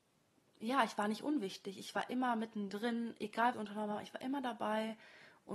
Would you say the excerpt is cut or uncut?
cut